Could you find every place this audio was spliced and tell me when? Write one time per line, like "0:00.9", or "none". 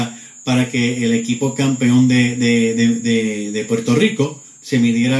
none